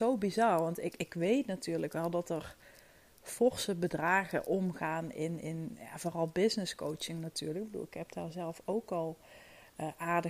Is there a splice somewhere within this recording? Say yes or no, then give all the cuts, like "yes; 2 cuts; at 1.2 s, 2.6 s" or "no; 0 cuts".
no; 0 cuts